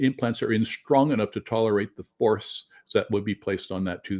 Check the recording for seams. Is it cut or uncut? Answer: uncut